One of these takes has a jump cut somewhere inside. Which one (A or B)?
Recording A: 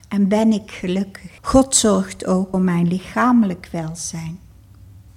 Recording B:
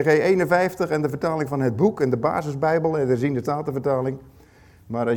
A